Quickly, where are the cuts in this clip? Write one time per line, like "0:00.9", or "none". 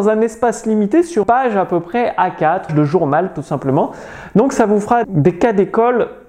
0:01.2
0:02.7
0:05.0

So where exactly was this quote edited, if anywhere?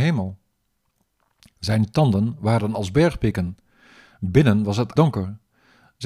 0:05.0

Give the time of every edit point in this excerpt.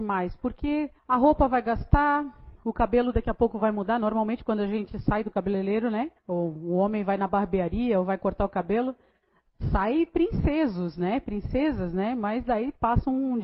0:01.0
0:06.2

